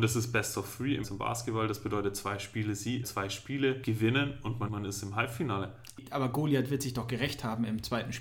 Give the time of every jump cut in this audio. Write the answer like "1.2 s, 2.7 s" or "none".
1.0 s, 3.0 s, 4.7 s